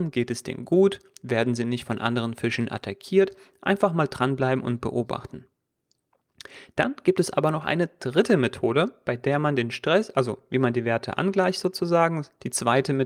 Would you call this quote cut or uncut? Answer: uncut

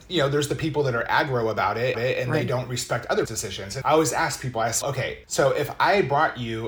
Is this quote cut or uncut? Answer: cut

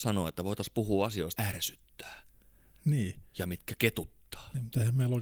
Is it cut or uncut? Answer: cut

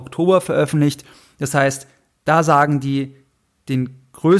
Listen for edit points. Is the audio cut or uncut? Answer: uncut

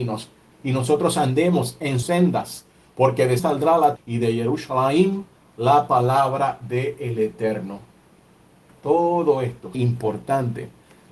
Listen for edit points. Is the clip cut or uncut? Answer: cut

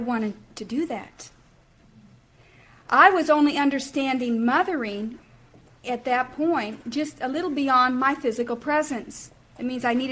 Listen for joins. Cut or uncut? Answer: uncut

